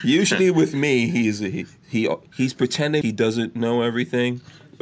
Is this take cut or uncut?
cut